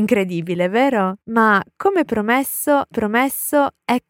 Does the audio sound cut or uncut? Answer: cut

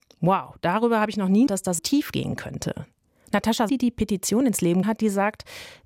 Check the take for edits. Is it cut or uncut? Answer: cut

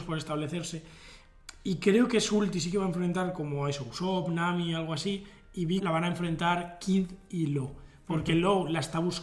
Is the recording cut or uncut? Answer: cut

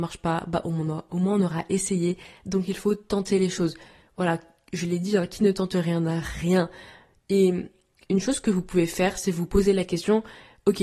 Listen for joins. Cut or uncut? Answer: uncut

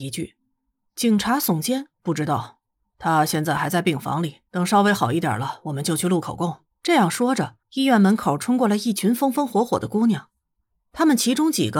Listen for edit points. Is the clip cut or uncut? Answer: cut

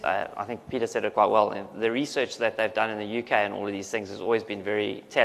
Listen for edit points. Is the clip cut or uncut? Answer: uncut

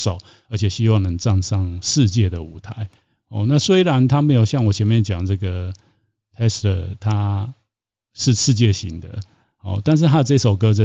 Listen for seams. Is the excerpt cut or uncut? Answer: uncut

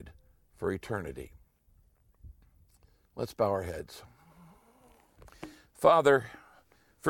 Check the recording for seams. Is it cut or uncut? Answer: uncut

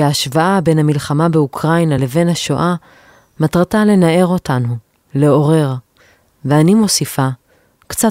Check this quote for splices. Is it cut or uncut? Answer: uncut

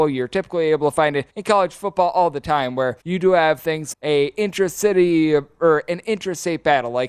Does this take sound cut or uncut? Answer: cut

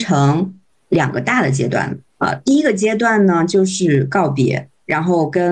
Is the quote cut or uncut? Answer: cut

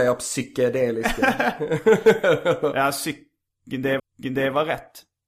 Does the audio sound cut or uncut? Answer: cut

